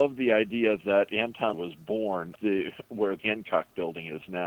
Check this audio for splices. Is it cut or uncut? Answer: cut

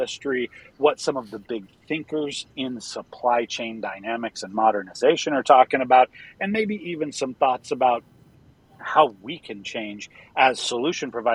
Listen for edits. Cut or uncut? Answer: uncut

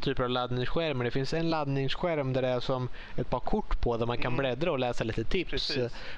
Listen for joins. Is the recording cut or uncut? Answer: uncut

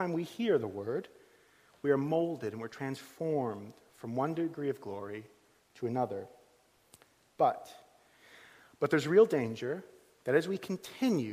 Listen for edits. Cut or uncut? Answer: uncut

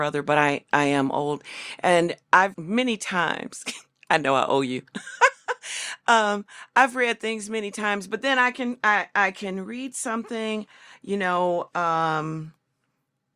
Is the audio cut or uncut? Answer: cut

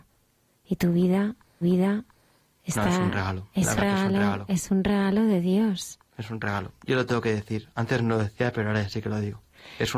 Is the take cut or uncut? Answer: cut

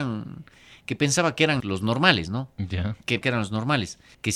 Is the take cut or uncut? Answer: cut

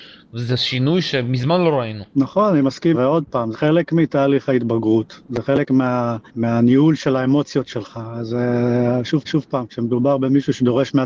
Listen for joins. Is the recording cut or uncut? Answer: cut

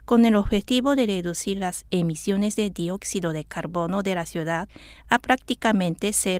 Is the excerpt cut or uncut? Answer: uncut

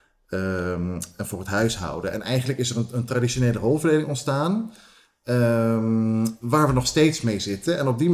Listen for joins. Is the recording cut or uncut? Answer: uncut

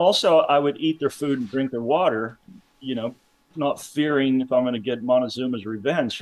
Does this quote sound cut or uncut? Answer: uncut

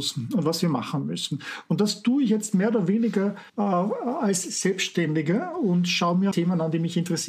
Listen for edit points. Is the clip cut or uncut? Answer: cut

